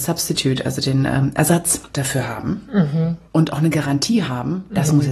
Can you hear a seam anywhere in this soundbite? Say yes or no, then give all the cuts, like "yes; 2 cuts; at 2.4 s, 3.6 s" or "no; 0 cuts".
yes; 2 cuts; at 1.9 s, 3.3 s